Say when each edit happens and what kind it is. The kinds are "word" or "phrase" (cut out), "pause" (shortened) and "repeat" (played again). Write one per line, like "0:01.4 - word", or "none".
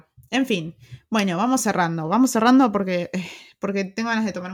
none